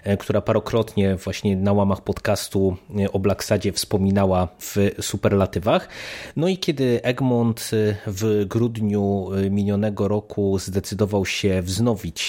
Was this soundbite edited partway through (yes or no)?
no